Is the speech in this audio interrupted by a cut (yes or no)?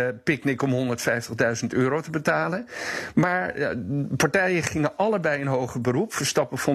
no